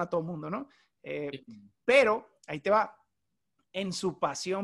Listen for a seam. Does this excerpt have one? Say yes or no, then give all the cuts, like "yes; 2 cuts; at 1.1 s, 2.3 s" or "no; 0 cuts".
yes; 1 cut; at 1.7 s